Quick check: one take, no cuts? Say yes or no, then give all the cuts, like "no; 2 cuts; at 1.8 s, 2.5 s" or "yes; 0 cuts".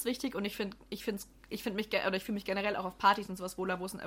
yes; 0 cuts